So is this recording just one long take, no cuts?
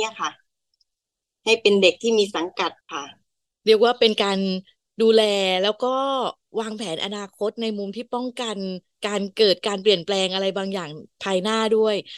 no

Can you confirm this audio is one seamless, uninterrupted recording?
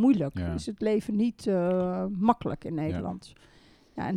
yes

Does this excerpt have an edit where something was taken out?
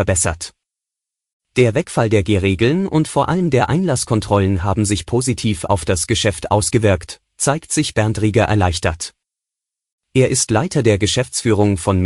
no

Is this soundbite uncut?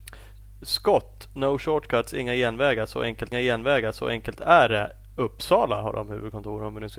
no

